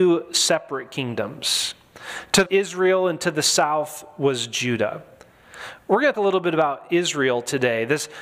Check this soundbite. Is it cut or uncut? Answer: cut